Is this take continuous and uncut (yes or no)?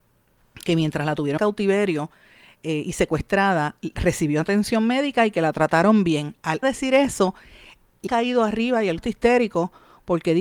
no